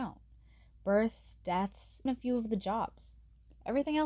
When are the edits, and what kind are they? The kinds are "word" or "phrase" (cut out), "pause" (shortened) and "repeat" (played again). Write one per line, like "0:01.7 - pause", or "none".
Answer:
0:02.1 - word